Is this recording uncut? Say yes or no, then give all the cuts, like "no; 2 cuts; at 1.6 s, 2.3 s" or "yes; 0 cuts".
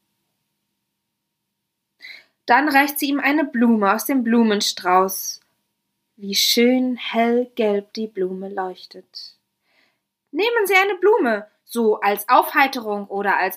yes; 0 cuts